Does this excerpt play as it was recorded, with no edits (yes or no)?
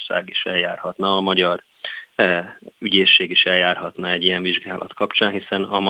yes